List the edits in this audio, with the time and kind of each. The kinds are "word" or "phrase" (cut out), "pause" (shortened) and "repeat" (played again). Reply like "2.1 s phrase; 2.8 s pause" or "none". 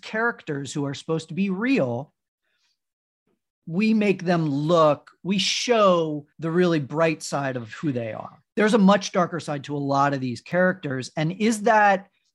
6.3 s pause; 8.5 s pause